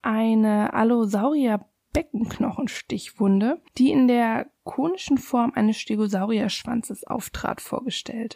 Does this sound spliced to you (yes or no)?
yes